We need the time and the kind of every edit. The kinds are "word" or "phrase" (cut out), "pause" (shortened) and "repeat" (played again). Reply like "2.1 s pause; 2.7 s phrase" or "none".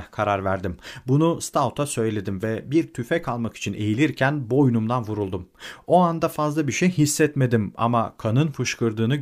none